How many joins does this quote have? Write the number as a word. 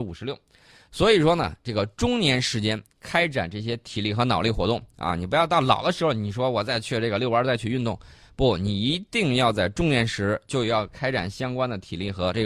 zero